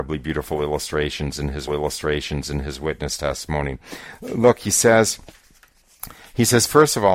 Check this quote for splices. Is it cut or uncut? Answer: cut